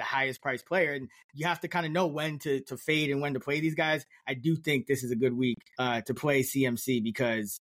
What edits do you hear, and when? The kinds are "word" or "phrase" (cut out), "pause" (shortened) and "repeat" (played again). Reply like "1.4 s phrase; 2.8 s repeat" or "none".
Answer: 5.7 s pause